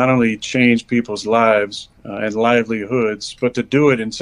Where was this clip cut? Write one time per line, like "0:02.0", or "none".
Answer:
0:02.0

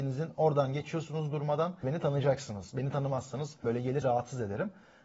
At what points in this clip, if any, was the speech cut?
0:01.8
0:03.6
0:04.0

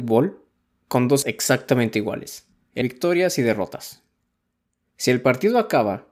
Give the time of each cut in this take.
0:01.2
0:02.8

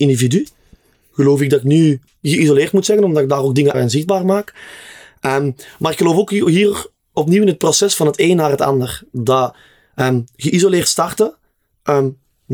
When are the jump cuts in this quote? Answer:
0:02.1
0:03.7

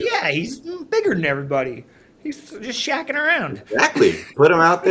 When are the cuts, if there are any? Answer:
none

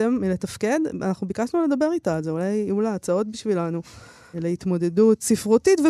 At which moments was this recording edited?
0:04.3

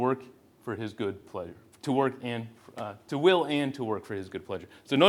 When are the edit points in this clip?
none

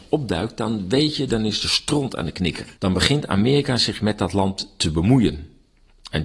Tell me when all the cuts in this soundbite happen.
0:02.8

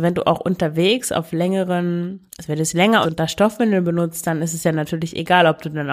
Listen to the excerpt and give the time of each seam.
0:02.3
0:03.0

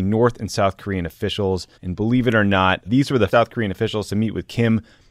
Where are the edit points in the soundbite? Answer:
0:01.7
0:02.8
0:03.3

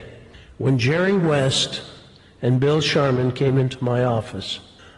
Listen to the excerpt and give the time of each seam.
none

